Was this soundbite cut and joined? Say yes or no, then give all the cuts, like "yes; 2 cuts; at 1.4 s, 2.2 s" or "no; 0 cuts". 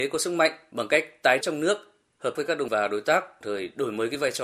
yes; 4 cuts; at 1.4 s, 2.3 s, 2.7 s, 3.4 s